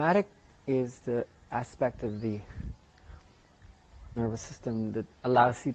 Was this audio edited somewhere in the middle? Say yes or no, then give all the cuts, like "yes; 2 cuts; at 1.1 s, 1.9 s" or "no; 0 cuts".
yes; 1 cut; at 4.2 s